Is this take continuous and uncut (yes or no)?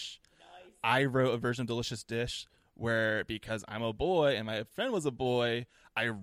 yes